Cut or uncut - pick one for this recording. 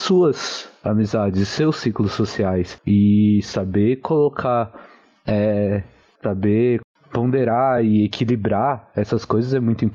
uncut